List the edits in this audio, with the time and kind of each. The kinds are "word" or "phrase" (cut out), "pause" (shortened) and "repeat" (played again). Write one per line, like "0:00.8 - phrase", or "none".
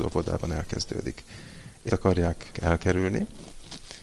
0:01.9 - word
0:02.5 - word